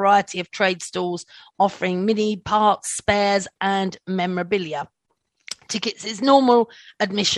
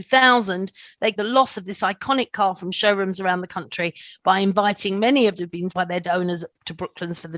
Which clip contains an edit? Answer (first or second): second